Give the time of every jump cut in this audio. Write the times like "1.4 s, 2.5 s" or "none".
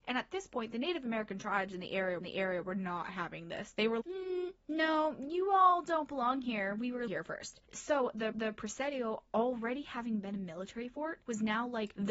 2.2 s, 4.0 s, 7.1 s, 8.3 s